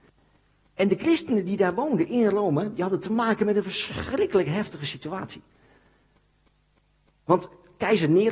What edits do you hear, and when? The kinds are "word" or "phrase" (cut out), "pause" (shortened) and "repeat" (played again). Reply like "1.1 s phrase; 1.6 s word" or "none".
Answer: none